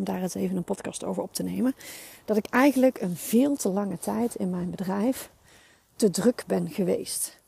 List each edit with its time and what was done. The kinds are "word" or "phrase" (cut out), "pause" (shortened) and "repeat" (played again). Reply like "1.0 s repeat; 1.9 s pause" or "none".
none